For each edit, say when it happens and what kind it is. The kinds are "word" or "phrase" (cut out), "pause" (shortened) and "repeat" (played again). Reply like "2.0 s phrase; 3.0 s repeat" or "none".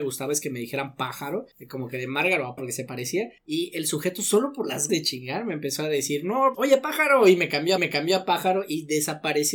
1.5 s pause; 2.6 s word; 3.4 s pause; 4.9 s word; 6.5 s word; 7.8 s repeat